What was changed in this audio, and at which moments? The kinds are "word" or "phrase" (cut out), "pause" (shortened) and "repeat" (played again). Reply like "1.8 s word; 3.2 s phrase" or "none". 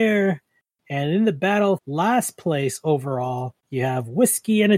1.8 s word; 3.6 s pause